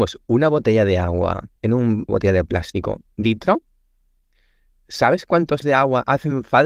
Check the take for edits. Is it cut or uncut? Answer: cut